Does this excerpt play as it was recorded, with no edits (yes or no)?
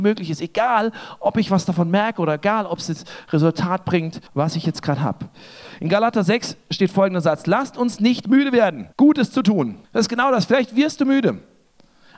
no